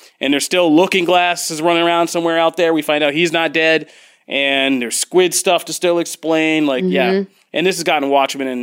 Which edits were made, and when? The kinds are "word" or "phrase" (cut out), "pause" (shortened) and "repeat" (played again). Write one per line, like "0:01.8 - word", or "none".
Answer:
none